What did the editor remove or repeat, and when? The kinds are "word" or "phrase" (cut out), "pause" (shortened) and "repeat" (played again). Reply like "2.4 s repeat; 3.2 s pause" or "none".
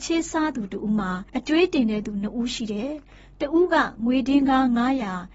1.3 s pause